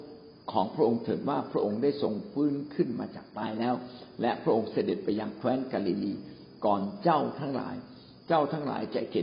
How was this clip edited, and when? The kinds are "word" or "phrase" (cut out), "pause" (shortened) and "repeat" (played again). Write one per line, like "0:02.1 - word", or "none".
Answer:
none